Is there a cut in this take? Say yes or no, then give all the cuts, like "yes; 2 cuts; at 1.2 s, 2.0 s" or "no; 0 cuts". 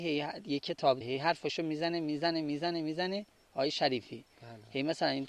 yes; 1 cut; at 1.0 s